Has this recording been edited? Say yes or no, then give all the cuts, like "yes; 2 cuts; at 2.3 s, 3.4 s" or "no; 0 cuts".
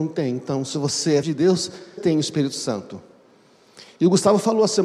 yes; 2 cuts; at 1.2 s, 2.0 s